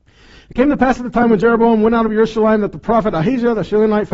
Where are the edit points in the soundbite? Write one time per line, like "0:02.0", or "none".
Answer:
none